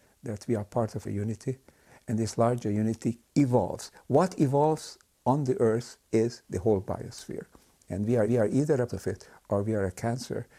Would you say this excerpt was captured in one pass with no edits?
no; 5 cuts; at 1.0 s, 3.3 s, 6.0 s, 8.3 s, 8.9 s

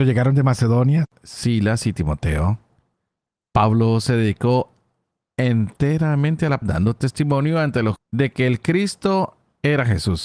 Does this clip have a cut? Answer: yes; 2 cuts; at 6.6 s, 8.0 s

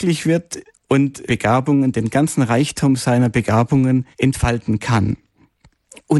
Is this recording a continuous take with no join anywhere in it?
no; 2 cuts; at 1.3 s, 4.1 s

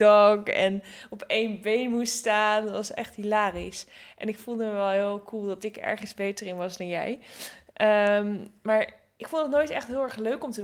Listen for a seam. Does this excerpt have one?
no; 0 cuts

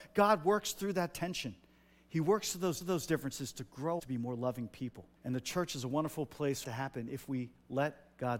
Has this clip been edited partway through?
yes; 4 cuts; at 2.8 s, 4.0 s, 5.2 s, 6.6 s

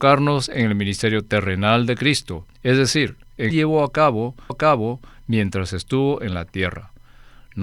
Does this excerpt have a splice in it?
yes; 3 cuts; at 2.5 s, 3.5 s, 4.5 s

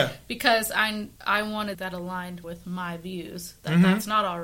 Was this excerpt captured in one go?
no; 3 cuts; at 1.2 s, 1.7 s, 2.4 s

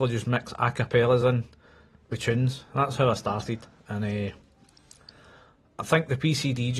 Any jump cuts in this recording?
no; 0 cuts

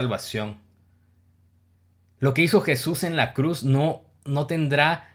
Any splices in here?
no; 0 cuts

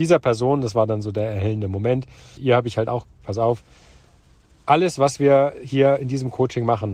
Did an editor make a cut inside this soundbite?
yes; 2 cuts; at 2.4 s, 3.2 s

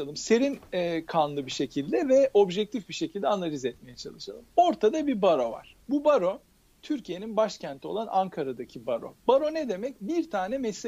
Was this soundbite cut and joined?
yes; 1 cut; at 5.8 s

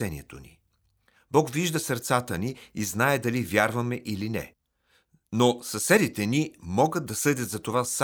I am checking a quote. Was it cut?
no; 0 cuts

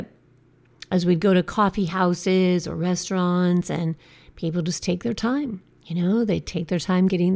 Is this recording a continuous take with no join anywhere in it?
yes; 0 cuts

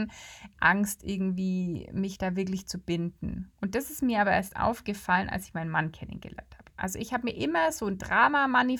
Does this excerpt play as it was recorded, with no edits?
no; 1 cut; at 3.6 s

